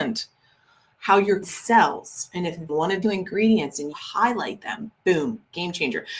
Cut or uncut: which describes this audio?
cut